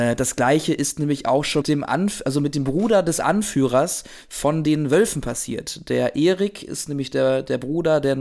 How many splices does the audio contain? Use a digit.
1